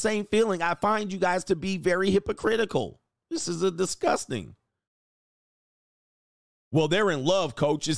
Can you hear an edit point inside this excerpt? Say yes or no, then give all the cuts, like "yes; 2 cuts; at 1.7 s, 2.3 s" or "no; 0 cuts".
no; 0 cuts